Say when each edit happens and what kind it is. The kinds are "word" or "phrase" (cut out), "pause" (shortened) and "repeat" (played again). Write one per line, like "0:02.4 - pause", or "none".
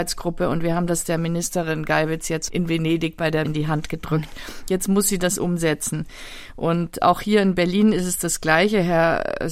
0:02.5 - word
0:03.4 - word